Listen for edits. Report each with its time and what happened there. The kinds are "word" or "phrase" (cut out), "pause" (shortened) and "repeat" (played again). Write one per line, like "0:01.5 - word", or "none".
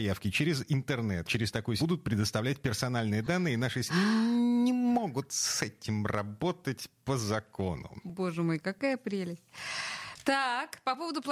0:01.2 - word
0:01.8 - word
0:03.9 - word